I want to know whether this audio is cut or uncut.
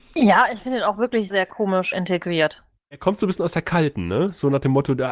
cut